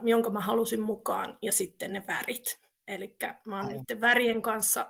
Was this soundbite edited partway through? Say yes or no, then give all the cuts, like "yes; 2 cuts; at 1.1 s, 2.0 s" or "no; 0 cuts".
no; 0 cuts